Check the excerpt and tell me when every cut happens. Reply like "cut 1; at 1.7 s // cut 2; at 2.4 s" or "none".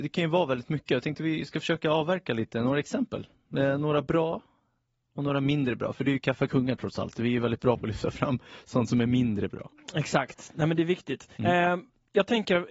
cut 1; at 11.3 s